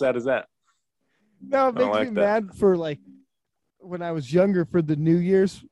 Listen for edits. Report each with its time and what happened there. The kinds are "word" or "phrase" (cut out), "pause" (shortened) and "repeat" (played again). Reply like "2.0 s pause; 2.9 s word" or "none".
none